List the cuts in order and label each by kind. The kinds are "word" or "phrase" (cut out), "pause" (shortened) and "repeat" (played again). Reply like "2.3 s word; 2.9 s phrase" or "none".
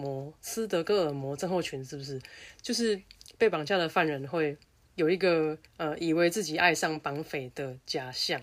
4.6 s pause; 5.7 s pause